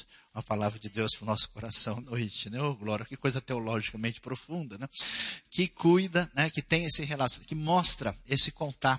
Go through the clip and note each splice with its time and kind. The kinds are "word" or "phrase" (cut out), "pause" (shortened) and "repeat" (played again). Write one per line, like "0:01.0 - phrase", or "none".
0:02.0 - word